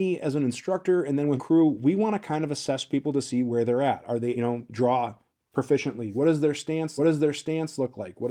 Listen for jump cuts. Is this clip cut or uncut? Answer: cut